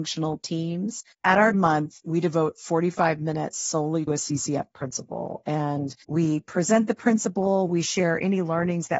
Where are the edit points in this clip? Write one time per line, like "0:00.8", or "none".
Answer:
0:01.1
0:01.5
0:04.1
0:06.0